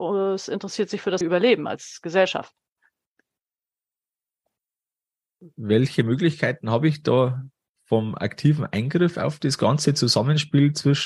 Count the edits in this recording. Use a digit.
1